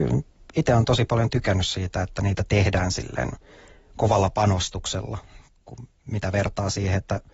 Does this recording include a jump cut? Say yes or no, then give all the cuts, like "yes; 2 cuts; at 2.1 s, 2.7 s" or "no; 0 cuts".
no; 0 cuts